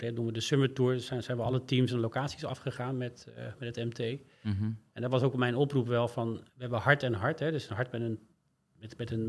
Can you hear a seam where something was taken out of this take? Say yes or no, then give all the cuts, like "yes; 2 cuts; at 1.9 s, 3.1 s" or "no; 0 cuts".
yes; 1 cut; at 6.5 s